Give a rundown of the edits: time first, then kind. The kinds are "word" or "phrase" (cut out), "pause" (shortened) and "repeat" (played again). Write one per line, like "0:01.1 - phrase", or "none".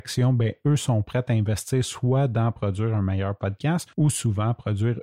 0:03.9 - pause